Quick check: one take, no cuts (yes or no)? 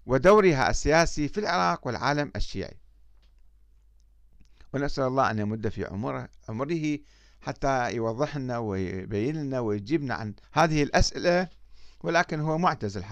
no